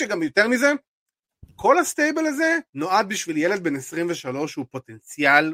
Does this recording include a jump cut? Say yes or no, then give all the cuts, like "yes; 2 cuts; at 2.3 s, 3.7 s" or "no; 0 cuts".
yes; 1 cut; at 2.7 s